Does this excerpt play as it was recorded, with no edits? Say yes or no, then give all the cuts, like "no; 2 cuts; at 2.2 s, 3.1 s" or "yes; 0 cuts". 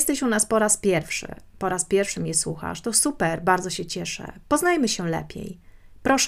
yes; 0 cuts